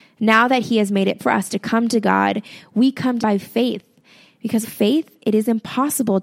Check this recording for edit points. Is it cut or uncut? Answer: cut